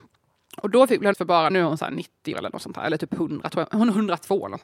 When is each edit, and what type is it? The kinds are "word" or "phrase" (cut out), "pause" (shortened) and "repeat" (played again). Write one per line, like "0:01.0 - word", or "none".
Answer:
0:01.1 - word
0:01.5 - phrase
0:02.3 - word

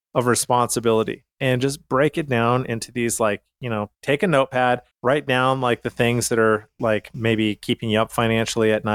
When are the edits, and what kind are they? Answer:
0:01.3 - pause
0:03.9 - pause
0:04.9 - pause

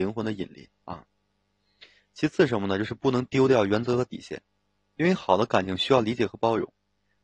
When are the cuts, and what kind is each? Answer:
none

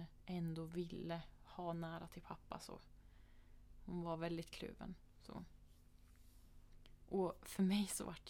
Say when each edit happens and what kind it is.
none

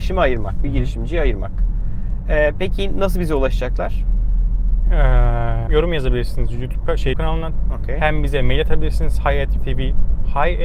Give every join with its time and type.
0:05.7 - word
0:07.1 - word
0:09.6 - word

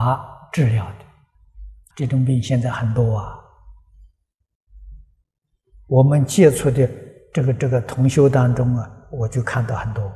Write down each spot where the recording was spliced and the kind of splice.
0:01.9 - word

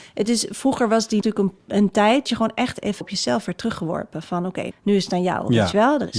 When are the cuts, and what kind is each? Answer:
0:01.2 - word
0:02.3 - word
0:03.0 - word
0:04.7 - word

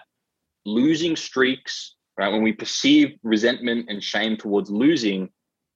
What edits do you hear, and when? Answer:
none

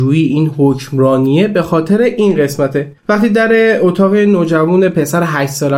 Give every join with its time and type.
0:03.0 - pause

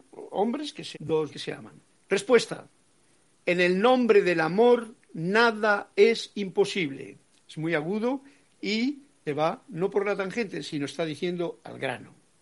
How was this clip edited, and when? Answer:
0:00.9 - word
0:01.3 - word
0:09.3 - word

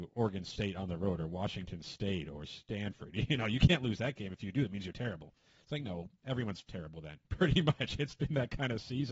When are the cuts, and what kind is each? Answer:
0:07.2 - pause

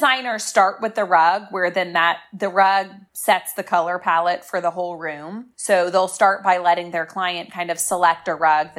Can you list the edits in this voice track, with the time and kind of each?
0:05.5 - pause

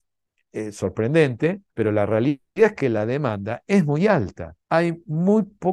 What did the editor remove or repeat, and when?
0:01.7 - pause
0:04.6 - pause

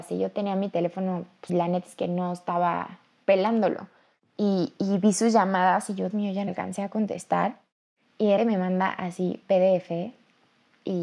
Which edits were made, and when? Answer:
0:01.5 - word
0:06.1 - word
0:06.5 - word
0:08.4 - word
0:09.4 - word

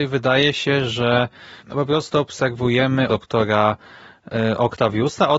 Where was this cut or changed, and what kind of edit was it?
0:01.6 - pause
0:03.1 - phrase

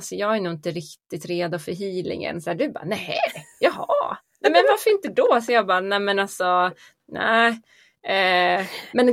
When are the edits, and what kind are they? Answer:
none

